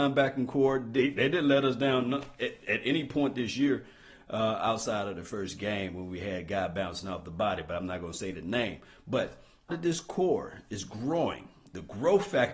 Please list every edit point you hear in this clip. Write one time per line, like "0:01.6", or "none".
0:09.7